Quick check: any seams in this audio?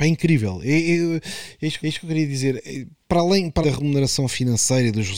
yes; 2 cuts; at 1.8 s, 3.6 s

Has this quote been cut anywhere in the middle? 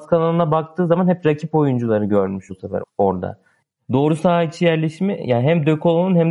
yes; 2 cuts; at 2.5 s, 2.8 s

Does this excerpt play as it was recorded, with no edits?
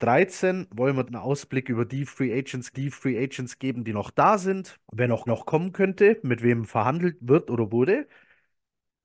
no; 4 cuts; at 1.1 s, 2.7 s, 4.8 s, 5.3 s

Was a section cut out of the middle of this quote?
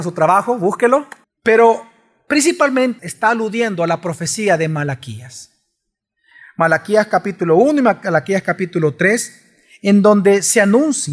yes; 2 cuts; at 1.2 s, 3.0 s

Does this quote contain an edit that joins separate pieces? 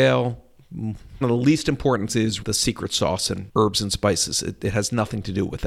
yes; 3 cuts; at 1.2 s, 2.1 s, 2.4 s

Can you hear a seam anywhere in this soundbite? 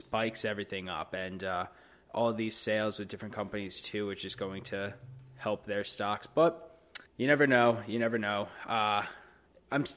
yes; 1 cut; at 7.1 s

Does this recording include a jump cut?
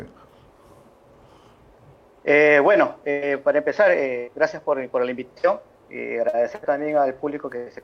no; 0 cuts

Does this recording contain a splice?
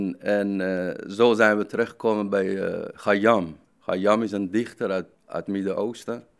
yes; 2 cuts; at 3.6 s, 5.1 s

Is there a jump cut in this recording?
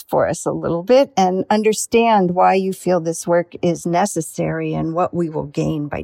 no; 0 cuts

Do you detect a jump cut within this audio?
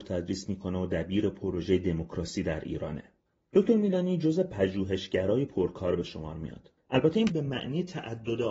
yes; 2 cuts; at 3.2 s, 7.3 s

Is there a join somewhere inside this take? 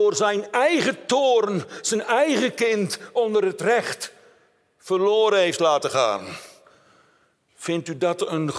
no; 0 cuts

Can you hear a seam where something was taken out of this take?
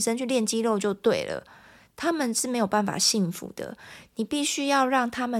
no; 0 cuts

